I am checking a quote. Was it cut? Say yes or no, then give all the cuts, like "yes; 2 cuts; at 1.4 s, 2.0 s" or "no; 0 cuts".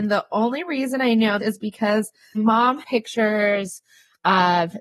yes; 3 cuts; at 1.4 s, 2.3 s, 2.8 s